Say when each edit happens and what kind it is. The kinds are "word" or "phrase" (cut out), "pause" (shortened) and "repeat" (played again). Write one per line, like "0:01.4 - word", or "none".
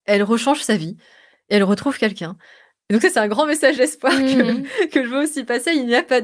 none